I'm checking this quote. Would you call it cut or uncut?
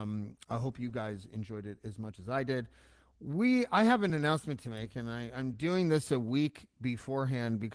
uncut